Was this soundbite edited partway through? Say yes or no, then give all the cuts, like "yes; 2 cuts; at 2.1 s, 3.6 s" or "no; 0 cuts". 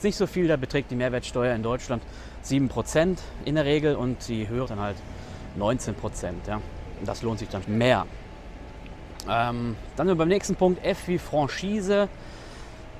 yes; 2 cuts; at 4.7 s, 7.6 s